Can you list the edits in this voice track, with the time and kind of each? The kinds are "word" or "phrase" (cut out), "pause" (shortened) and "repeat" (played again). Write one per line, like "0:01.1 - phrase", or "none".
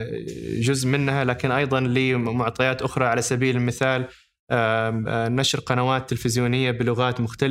none